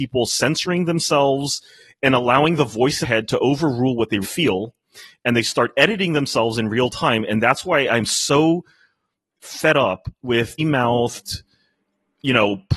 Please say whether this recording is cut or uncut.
cut